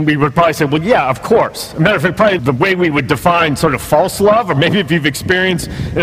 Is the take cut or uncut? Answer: cut